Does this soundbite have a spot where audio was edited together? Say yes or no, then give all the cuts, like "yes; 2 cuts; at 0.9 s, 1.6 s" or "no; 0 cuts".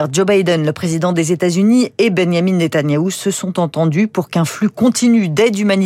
no; 0 cuts